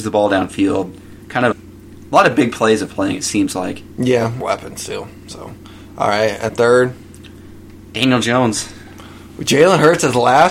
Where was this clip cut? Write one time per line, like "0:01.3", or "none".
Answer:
0:01.2
0:01.5
0:02.9
0:04.4
0:06.5
0:07.8